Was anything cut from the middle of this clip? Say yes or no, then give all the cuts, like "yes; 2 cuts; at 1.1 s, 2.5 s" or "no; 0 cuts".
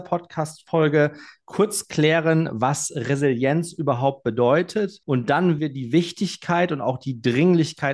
yes; 2 cuts; at 5.0 s, 5.6 s